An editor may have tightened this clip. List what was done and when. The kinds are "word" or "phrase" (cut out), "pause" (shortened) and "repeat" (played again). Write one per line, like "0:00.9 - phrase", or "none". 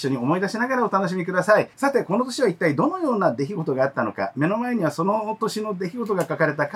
0:01.7 - pause